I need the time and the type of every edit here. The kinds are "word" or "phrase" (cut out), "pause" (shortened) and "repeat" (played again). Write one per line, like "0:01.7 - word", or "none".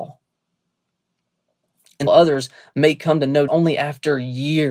0:02.1 - word
0:03.5 - word